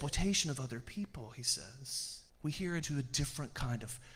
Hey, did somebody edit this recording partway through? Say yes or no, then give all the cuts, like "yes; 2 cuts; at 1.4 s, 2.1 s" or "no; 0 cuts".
yes; 2 cuts; at 2.3 s, 2.8 s